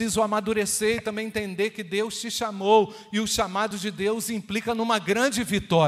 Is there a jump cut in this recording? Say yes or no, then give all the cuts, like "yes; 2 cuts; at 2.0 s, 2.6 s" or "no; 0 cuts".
no; 0 cuts